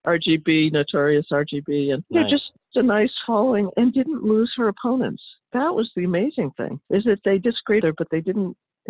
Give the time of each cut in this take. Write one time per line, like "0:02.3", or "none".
0:02.0
0:02.7
0:06.8
0:07.8